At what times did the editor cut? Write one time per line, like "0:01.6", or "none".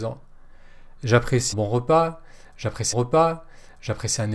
0:01.5
0:02.9